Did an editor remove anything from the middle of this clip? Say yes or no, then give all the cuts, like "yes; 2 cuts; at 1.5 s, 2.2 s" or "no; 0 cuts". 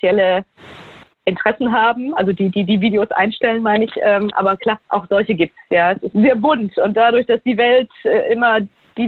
yes; 1 cut; at 6.1 s